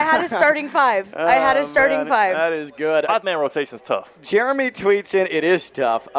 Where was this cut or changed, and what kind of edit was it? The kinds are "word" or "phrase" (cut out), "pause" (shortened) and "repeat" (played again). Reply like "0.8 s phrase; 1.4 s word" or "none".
3.1 s word

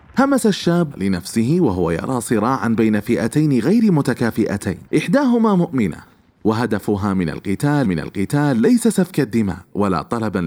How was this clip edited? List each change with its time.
0.9 s word; 4.9 s pause; 7.8 s repeat

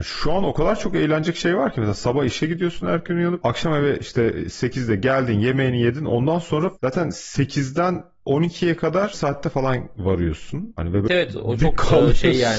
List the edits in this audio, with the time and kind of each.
9.1 s word; 11.1 s word

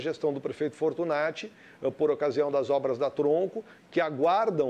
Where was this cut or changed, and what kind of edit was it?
none

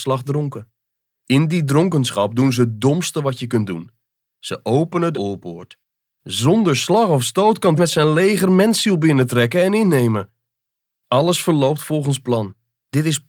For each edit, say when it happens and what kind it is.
5.1 s phrase; 7.8 s word

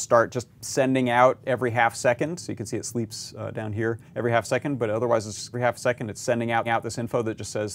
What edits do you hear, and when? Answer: 4.1 s pause; 5.5 s word; 6.6 s repeat

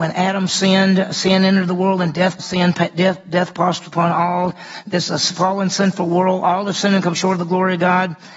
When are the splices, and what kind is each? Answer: 2.4 s word

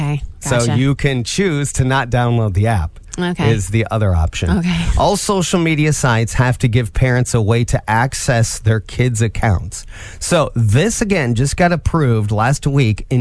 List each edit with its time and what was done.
none

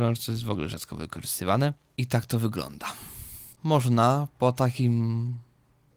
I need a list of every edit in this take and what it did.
3.5 s pause

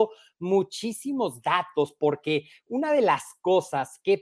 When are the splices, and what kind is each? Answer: none

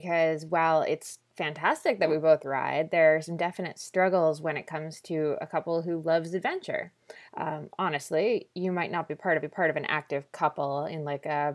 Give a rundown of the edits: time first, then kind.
7.3 s pause; 9.4 s repeat

